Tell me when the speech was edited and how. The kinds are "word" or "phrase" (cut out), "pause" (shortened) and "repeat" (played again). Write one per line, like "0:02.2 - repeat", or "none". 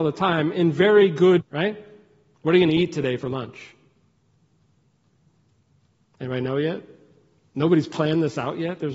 0:01.4 - word